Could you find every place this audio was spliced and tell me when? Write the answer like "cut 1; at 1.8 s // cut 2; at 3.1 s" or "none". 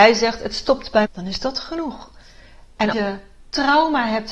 cut 1; at 1.0 s // cut 2; at 2.9 s